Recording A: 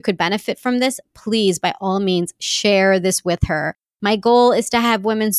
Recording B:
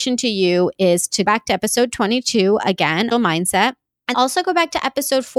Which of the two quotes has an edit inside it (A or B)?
B